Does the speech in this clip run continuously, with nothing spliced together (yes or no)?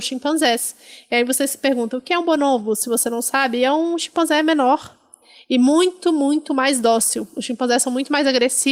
yes